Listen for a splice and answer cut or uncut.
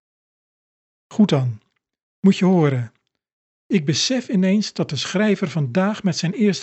uncut